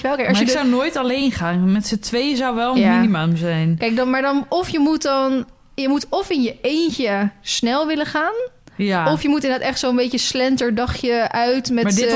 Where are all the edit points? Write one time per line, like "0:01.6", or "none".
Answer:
none